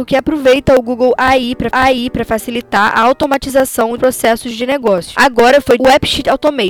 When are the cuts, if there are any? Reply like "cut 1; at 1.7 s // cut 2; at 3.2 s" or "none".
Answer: cut 1; at 1.7 s // cut 2; at 4.0 s // cut 3; at 5.8 s